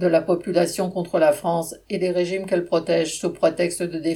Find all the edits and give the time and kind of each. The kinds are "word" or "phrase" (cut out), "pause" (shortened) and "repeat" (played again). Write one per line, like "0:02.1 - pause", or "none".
none